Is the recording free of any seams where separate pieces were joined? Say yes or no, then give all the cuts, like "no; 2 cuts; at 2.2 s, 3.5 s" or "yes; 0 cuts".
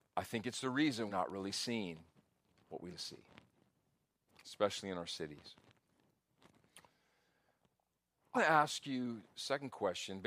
no; 4 cuts; at 1.1 s, 2.9 s, 4.0 s, 8.3 s